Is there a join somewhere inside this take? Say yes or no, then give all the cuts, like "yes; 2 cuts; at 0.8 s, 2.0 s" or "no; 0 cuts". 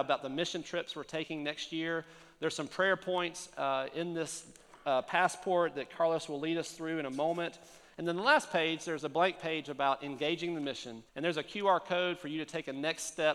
yes; 1 cut; at 11.1 s